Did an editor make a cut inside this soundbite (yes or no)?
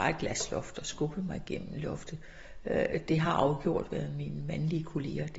no